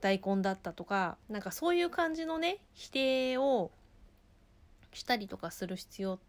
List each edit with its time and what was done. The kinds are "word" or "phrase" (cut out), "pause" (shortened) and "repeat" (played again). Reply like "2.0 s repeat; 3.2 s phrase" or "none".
1.2 s pause